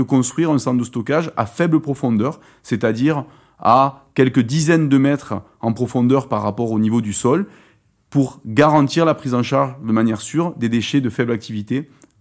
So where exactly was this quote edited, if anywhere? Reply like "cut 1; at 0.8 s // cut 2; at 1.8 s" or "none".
none